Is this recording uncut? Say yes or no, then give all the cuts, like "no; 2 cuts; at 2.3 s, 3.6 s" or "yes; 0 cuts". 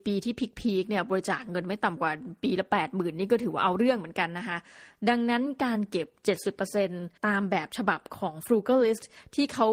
no; 1 cut; at 7.2 s